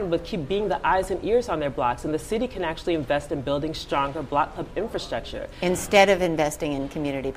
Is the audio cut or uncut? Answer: uncut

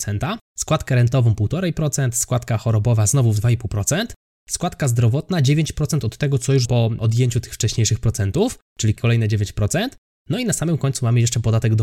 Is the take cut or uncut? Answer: cut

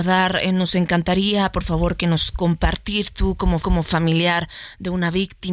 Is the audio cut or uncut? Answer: cut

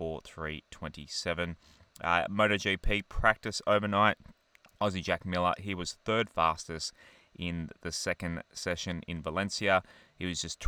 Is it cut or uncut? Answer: uncut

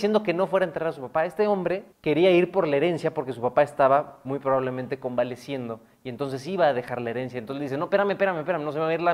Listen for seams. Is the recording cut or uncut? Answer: cut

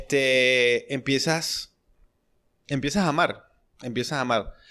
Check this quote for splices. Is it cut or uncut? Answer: uncut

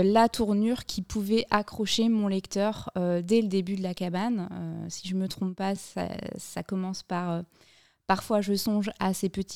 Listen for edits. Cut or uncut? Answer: uncut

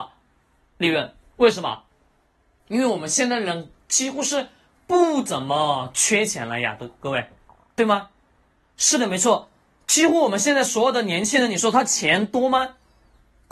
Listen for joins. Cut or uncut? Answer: uncut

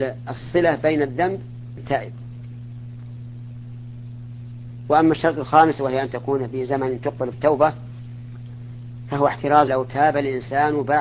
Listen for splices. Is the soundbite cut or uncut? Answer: cut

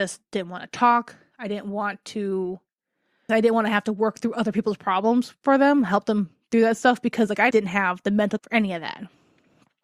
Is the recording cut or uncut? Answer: cut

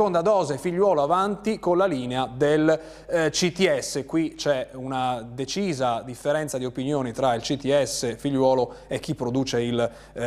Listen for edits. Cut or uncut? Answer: uncut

